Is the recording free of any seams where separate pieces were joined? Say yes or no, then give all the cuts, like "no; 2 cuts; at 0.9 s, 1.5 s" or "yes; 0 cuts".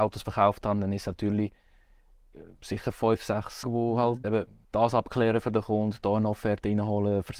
no; 4 cuts; at 2.6 s, 3.6 s, 4.2 s, 4.6 s